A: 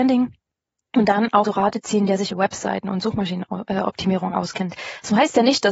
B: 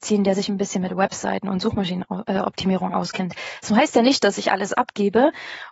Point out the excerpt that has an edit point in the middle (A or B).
A